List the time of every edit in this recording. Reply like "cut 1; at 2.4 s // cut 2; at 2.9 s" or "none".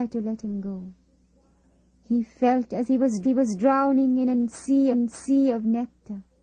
cut 1; at 3.2 s // cut 2; at 4.9 s